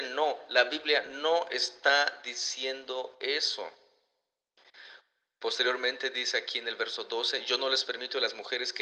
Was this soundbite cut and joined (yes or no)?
no